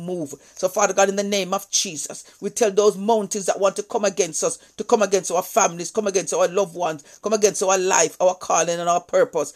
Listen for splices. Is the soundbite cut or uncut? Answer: uncut